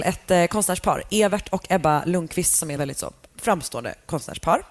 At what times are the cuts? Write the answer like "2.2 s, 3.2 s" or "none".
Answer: 2.8 s